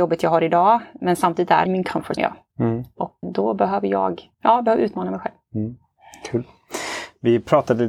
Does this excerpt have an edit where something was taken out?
yes; 4 cuts; at 1.7 s, 2.2 s, 3.2 s, 4.3 s

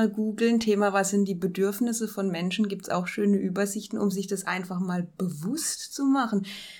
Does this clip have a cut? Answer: no; 0 cuts

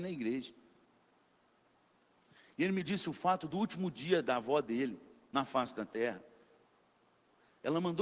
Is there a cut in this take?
no; 0 cuts

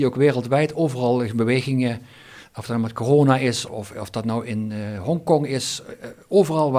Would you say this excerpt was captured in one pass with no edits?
no; 1 cut; at 3.7 s

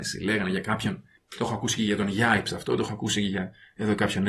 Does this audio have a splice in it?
no; 0 cuts

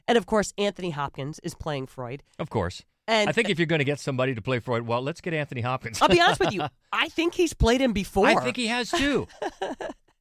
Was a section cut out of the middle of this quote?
no; 0 cuts

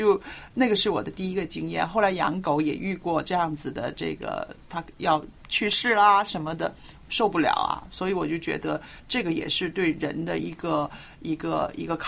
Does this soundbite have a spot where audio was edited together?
yes; 1 cut; at 5.4 s

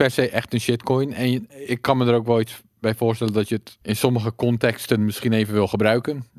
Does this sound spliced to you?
yes; 1 cut; at 3.8 s

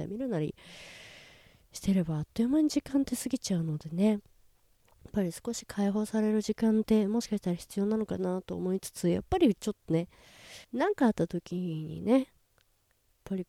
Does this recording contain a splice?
yes; 1 cut; at 10.6 s

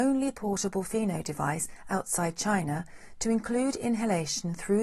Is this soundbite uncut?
yes; 0 cuts

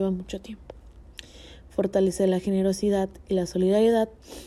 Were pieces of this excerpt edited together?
no; 0 cuts

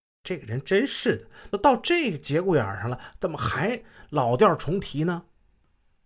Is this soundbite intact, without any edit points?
yes; 0 cuts

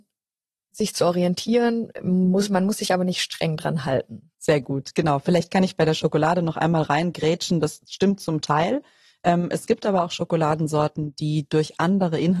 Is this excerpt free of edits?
no; 1 cut; at 4.3 s

